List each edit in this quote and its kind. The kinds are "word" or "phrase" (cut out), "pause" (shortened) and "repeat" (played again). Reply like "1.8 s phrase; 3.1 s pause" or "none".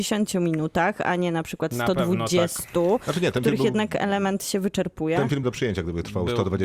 5.4 s phrase